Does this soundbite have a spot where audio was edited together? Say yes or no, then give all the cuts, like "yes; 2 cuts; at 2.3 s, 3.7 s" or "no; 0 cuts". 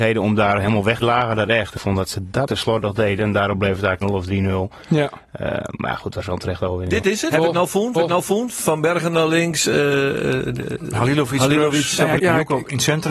yes; 6 cuts; at 1.0 s, 1.8 s, 2.5 s, 4.0 s, 7.9 s, 12.2 s